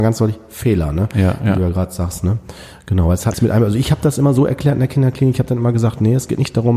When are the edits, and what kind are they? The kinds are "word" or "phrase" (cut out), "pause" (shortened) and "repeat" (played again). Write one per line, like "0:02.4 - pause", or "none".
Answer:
0:03.3 - word